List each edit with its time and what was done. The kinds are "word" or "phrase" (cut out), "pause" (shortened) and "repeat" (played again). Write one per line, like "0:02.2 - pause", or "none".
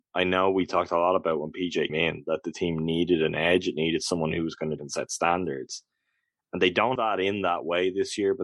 0:01.9 - word
0:04.8 - word
0:07.0 - word